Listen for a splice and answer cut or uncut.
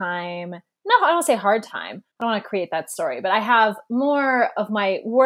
cut